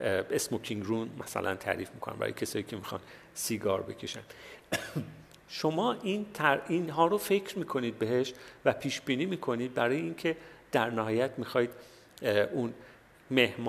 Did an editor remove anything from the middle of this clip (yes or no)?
no